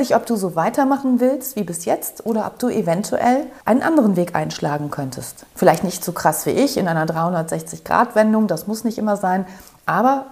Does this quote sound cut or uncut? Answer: cut